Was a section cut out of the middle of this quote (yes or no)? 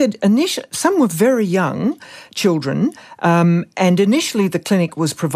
no